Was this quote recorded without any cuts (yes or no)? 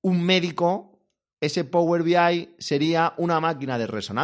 yes